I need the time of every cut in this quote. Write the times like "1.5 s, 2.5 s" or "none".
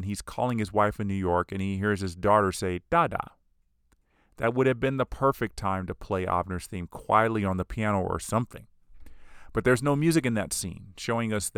none